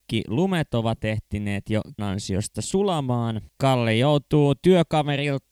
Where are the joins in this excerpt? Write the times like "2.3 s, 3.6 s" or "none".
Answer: 2.0 s, 3.6 s